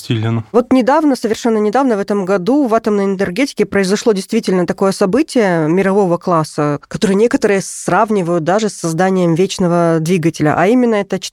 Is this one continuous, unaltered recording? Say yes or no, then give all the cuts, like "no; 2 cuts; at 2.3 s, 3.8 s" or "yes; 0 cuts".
yes; 0 cuts